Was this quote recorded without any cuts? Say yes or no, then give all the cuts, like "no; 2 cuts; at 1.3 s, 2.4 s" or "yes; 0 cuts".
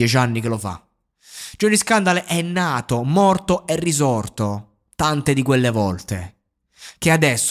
yes; 0 cuts